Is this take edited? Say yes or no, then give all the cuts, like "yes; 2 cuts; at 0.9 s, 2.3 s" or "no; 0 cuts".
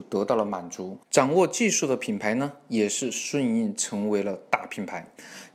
yes; 1 cut; at 1.0 s